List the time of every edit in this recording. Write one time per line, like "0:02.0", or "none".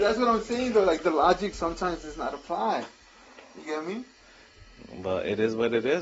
none